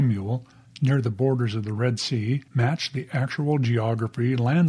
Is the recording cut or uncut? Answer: cut